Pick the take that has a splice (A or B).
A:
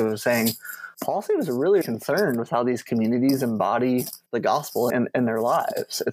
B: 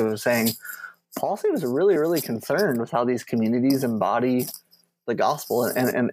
A